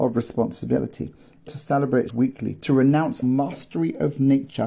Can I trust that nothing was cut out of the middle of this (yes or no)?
no